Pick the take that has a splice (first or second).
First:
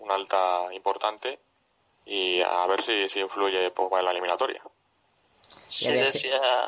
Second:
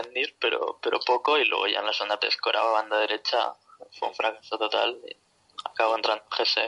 second